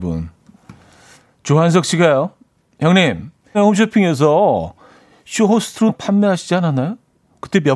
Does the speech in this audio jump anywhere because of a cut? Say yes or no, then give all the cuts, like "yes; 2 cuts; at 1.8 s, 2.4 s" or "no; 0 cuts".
yes; 3 cuts; at 1.1 s, 3.5 s, 5.9 s